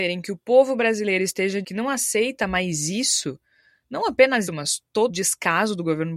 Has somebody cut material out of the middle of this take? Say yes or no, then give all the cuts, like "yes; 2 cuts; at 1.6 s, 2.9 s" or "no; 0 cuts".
yes; 3 cuts; at 1.6 s, 4.5 s, 5.1 s